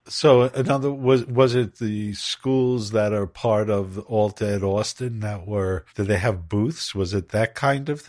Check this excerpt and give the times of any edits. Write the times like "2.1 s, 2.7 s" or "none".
5.9 s